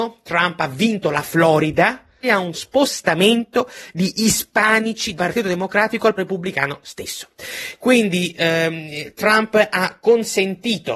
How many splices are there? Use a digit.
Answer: 4